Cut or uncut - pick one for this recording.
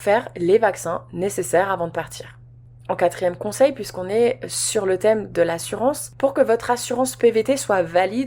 uncut